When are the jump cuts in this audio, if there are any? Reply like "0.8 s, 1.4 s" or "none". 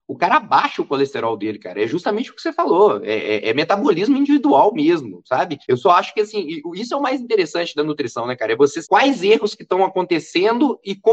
5.6 s, 8.8 s